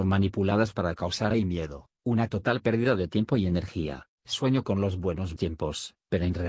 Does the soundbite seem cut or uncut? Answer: cut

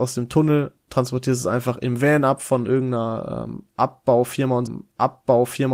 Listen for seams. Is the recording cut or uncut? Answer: cut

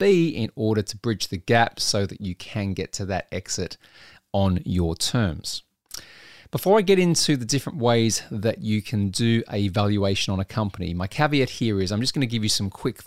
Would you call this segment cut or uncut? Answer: uncut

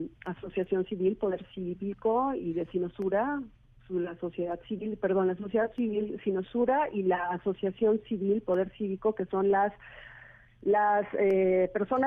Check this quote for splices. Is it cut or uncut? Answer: uncut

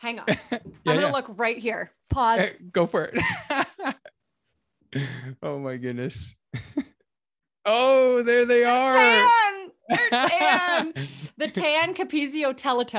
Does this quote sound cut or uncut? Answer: uncut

